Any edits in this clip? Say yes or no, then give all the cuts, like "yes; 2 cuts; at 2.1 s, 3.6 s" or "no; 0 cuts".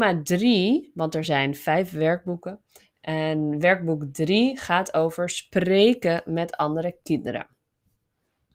no; 0 cuts